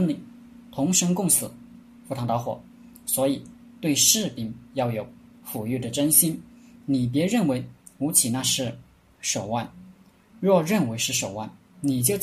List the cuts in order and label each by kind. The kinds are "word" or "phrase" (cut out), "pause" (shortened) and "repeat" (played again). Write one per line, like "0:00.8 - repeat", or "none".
none